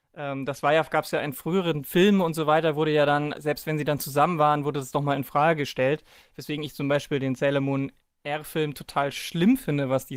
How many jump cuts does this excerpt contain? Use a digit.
0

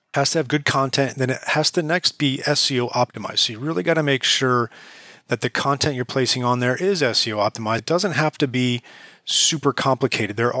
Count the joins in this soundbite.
1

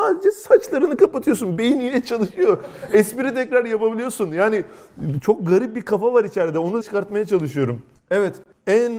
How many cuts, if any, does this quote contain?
1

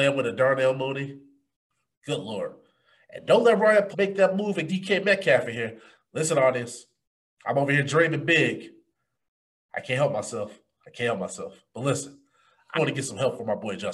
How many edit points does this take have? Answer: 3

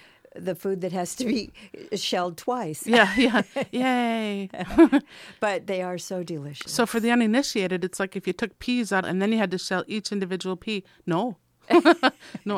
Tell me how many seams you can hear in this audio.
1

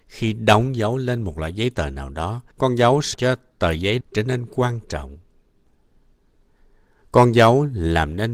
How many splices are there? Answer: 3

